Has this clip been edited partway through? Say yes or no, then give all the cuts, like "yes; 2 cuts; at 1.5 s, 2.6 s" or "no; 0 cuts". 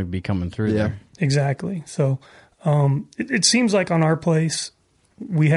no; 0 cuts